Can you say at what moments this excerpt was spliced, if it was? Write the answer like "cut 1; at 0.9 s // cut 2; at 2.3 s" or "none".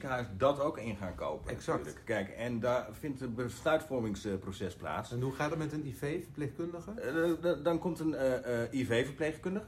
none